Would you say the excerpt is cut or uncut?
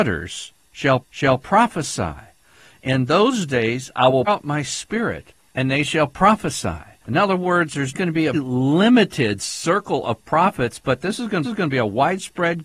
cut